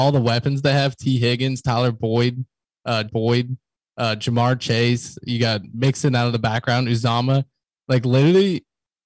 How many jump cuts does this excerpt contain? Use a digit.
1